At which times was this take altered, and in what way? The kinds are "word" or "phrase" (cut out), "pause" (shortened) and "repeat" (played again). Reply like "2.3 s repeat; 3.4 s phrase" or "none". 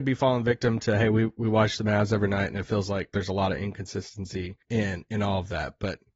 4.6 s pause